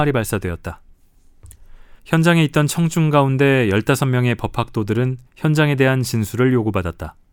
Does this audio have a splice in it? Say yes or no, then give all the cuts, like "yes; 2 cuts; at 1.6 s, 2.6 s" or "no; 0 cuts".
yes; 2 cuts; at 2.0 s, 5.3 s